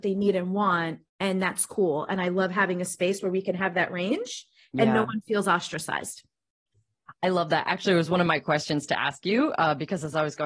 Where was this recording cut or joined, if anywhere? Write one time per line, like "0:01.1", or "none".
0:01.1